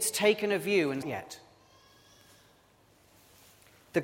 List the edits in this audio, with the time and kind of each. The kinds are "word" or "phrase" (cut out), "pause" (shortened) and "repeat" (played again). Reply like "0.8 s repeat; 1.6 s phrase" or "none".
1.0 s phrase

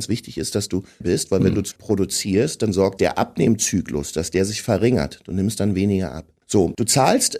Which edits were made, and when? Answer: 1.0 s word; 1.7 s phrase; 3.0 s phrase

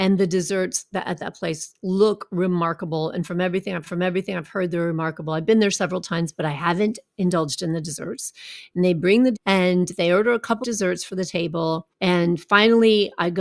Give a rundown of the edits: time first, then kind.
3.9 s repeat; 9.3 s word; 10.6 s word; 11.9 s pause

